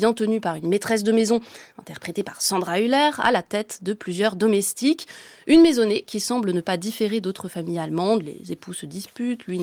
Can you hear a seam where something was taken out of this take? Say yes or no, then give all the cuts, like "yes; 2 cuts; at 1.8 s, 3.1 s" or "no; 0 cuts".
no; 0 cuts